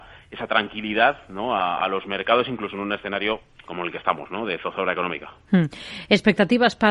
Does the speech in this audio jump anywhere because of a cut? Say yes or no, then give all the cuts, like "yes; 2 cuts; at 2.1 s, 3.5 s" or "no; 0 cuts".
yes; 1 cut; at 3.7 s